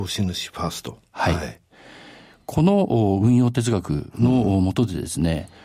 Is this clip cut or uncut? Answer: uncut